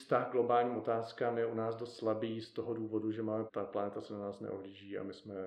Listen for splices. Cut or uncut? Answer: cut